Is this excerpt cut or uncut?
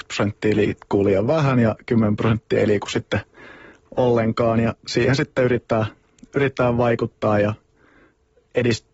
uncut